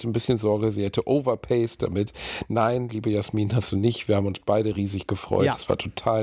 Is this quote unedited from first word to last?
yes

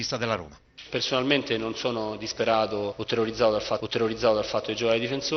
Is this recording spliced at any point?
yes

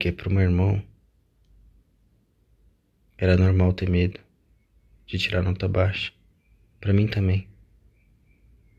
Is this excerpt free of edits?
yes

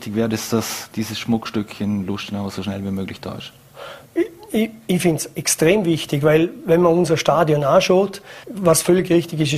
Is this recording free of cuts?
no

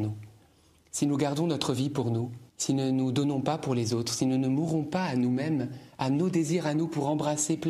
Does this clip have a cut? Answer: yes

